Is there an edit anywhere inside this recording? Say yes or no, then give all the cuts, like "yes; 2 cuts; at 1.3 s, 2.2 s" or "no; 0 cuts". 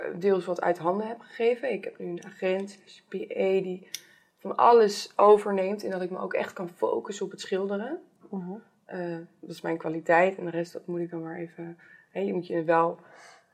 no; 0 cuts